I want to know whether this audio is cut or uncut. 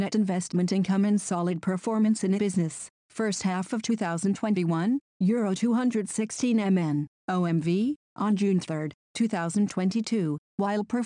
cut